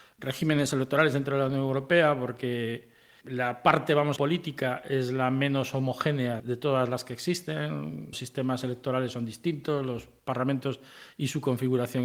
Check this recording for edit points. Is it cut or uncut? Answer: cut